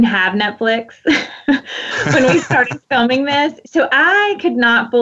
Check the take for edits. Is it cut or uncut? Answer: uncut